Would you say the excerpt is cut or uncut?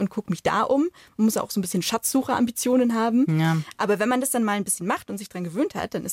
uncut